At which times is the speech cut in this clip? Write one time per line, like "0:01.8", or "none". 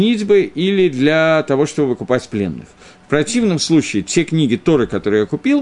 none